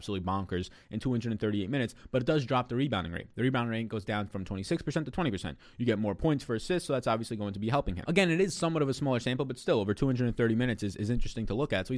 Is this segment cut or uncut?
uncut